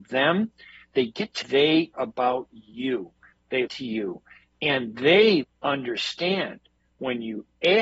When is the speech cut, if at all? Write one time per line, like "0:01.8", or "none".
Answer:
0:01.4
0:01.9
0:03.7
0:05.4